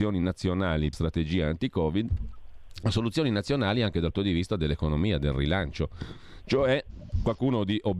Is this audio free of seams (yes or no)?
no